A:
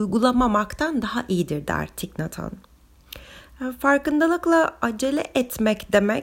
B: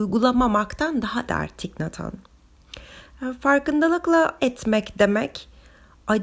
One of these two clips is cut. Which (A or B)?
B